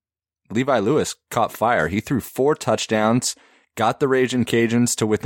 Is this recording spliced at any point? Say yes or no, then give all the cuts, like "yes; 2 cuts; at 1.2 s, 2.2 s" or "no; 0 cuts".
no; 0 cuts